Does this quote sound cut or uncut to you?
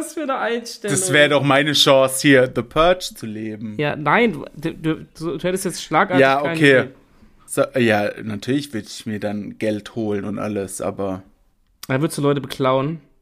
uncut